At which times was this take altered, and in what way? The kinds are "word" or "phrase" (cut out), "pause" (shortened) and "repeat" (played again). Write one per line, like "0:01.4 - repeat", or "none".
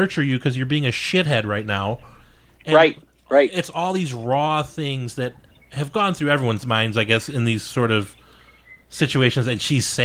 none